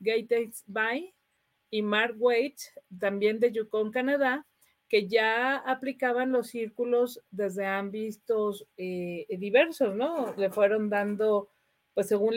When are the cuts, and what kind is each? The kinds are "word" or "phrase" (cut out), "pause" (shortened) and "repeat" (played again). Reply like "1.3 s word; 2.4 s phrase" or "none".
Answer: none